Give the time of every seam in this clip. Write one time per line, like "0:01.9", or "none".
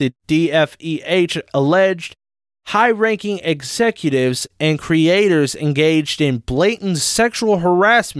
none